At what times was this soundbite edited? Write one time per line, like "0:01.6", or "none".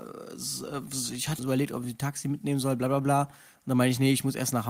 0:01.4